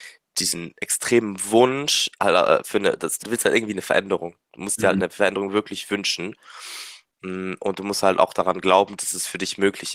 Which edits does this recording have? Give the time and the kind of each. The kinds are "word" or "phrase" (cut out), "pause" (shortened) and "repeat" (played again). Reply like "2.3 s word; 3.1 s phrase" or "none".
2.1 s pause; 3.2 s word